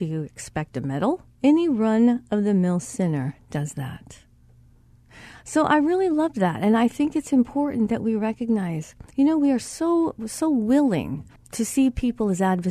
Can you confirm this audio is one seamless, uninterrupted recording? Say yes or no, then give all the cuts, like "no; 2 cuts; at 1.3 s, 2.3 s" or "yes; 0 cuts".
no; 3 cuts; at 1.3 s, 9.1 s, 11.4 s